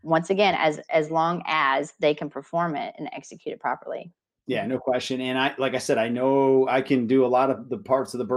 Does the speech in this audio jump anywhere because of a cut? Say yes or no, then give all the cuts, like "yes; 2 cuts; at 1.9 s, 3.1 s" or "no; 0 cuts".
no; 0 cuts